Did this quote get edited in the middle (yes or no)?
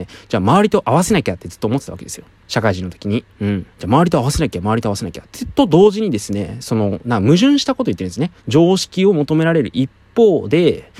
yes